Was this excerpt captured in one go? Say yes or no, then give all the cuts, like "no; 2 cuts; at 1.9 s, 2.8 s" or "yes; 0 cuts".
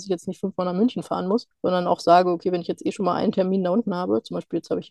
yes; 0 cuts